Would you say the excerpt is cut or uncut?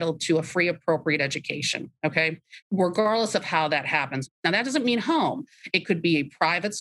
cut